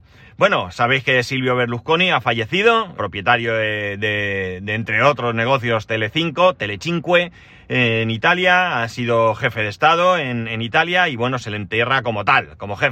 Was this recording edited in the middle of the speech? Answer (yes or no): yes